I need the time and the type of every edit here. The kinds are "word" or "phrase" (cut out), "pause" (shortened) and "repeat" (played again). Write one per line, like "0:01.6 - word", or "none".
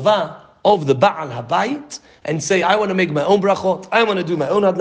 none